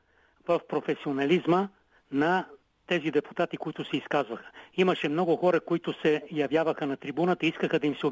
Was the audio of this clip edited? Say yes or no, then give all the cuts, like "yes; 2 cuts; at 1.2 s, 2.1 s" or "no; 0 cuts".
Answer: no; 0 cuts